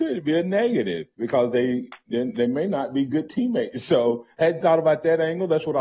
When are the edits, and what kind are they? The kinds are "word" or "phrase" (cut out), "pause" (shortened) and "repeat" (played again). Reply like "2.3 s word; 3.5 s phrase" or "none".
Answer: 1.1 s pause